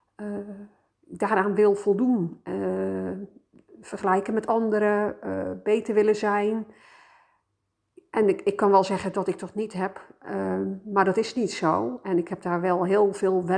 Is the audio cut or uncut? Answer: uncut